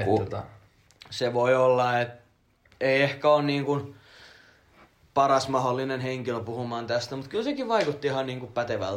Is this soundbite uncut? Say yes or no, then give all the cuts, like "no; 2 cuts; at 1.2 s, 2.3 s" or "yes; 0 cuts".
yes; 0 cuts